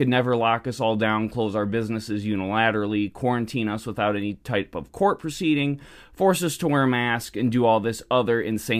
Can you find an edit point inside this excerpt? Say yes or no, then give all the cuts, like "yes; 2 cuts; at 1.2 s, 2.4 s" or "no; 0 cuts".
no; 0 cuts